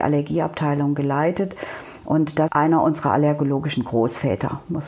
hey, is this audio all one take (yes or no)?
no